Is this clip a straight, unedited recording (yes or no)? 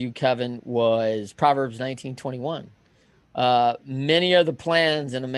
yes